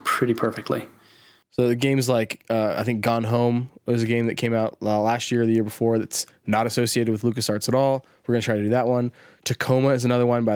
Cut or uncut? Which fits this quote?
uncut